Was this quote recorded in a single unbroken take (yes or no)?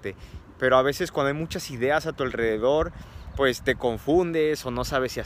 yes